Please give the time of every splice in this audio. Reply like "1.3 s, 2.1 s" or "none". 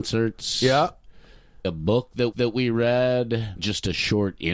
1.6 s, 2.3 s, 3.6 s